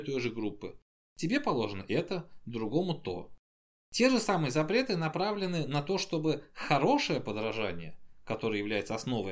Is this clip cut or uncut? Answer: uncut